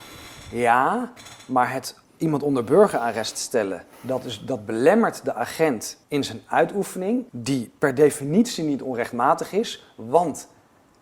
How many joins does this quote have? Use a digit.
4